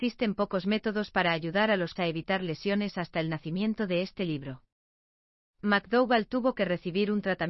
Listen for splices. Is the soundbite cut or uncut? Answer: cut